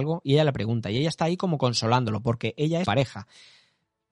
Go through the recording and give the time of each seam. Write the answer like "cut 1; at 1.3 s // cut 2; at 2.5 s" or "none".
cut 1; at 2.8 s